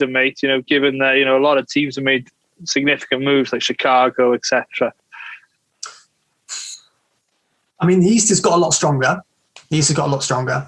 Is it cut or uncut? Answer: uncut